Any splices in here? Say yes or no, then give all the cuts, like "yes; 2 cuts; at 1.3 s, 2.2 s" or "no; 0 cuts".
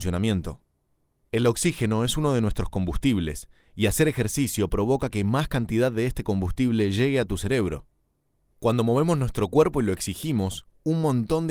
no; 0 cuts